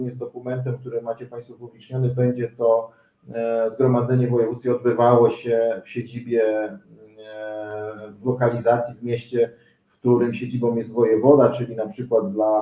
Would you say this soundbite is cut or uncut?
uncut